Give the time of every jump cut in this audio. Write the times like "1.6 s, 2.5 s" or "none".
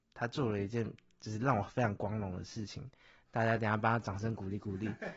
none